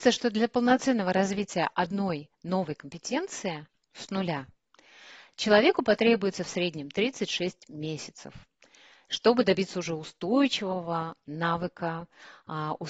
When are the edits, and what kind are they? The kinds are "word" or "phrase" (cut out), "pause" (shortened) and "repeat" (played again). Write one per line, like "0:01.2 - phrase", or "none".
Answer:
none